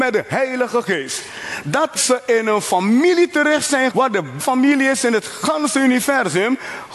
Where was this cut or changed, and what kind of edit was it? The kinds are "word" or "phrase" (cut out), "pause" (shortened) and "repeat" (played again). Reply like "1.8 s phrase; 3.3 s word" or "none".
2.0 s word; 3.9 s word; 4.4 s word